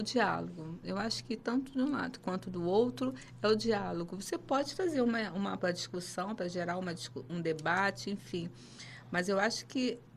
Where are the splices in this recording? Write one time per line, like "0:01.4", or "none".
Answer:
0:05.6
0:07.3